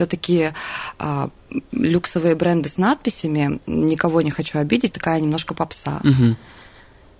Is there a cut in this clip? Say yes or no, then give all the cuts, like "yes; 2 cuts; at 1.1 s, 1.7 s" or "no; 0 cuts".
yes; 1 cut; at 4.9 s